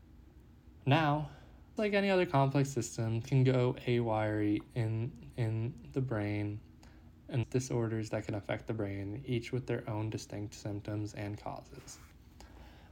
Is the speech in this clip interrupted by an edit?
yes; 4 cuts; at 1.8 s, 3.2 s, 5.3 s, 7.4 s

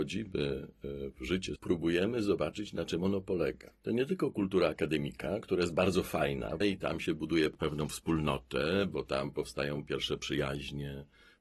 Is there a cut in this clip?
yes; 2 cuts; at 1.6 s, 6.6 s

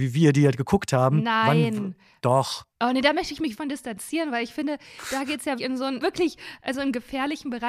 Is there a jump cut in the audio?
yes; 4 cuts; at 2.7 s, 3.5 s, 5.6 s, 6.0 s

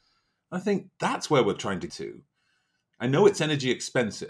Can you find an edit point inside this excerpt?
yes; 2 cuts; at 0.9 s, 1.9 s

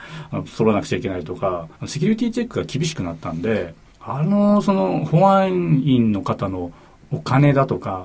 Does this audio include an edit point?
yes; 2 cuts; at 1.7 s, 3.9 s

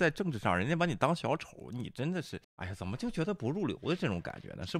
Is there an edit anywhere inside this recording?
yes; 1 cut; at 2.4 s

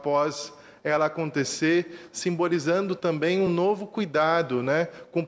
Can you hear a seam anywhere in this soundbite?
no; 0 cuts

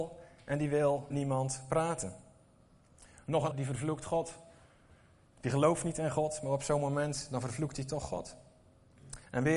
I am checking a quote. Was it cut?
yes; 2 cuts; at 1.1 s, 3.5 s

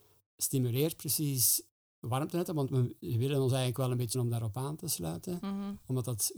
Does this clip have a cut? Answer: yes; 1 cut; at 4.1 s

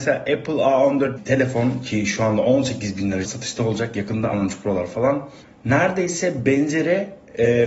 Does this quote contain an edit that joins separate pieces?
yes; 3 cuts; at 1.2 s, 3.2 s, 4.3 s

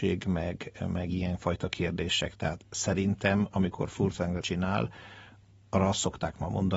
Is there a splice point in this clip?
yes; 1 cut; at 4.4 s

